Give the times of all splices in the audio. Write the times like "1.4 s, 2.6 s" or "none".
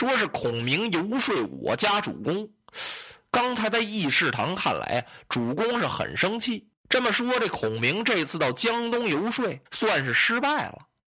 6.8 s, 9.7 s